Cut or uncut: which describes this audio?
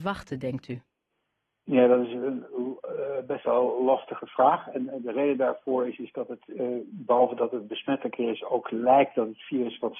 uncut